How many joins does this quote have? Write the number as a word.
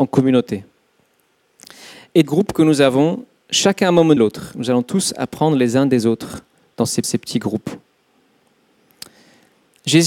three